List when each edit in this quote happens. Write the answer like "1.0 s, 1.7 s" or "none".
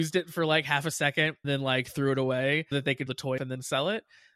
1.4 s, 2.7 s, 3.1 s, 3.4 s